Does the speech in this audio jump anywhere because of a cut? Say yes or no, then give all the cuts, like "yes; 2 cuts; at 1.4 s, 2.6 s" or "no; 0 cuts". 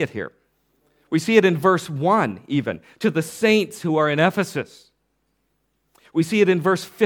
no; 0 cuts